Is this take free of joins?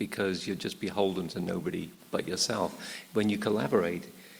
yes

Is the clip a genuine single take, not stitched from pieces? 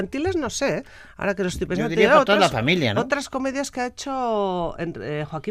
yes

